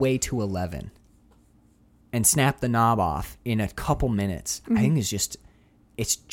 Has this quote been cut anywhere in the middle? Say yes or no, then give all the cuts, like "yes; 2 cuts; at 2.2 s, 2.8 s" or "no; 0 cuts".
no; 0 cuts